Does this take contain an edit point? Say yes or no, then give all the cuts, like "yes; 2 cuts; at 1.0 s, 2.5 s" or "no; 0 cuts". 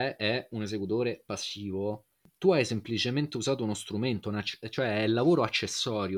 no; 0 cuts